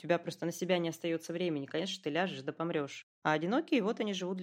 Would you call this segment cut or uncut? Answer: cut